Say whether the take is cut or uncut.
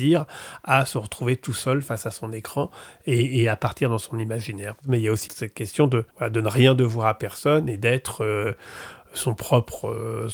cut